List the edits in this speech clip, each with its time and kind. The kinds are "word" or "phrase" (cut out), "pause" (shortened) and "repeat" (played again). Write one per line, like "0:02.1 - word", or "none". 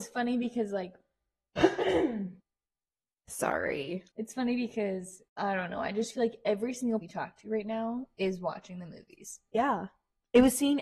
0:02.4 - pause
0:04.1 - pause
0:05.3 - pause
0:07.0 - word